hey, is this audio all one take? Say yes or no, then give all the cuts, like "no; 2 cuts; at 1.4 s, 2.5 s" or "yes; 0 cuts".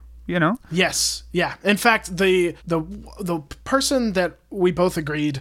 no; 1 cut; at 2.6 s